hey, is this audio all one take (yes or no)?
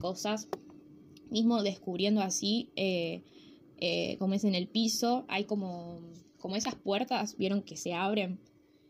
yes